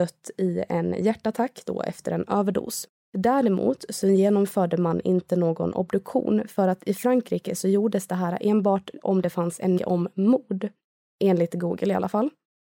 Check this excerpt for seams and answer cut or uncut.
cut